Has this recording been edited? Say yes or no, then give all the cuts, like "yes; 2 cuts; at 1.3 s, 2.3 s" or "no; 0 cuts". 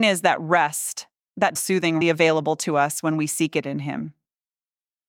yes; 2 cuts; at 1.6 s, 2.0 s